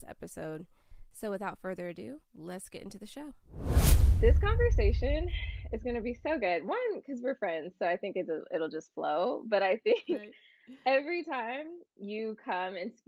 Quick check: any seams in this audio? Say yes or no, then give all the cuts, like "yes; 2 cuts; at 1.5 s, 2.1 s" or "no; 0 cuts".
yes; 1 cut; at 2.2 s